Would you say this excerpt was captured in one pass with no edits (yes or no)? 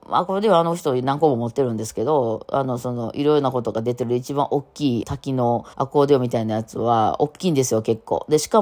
no